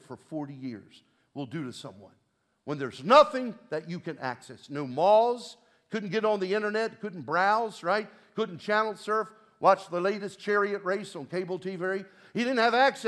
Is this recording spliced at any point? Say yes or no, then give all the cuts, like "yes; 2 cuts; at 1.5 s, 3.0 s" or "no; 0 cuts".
no; 0 cuts